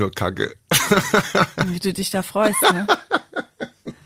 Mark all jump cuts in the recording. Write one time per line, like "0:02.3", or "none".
none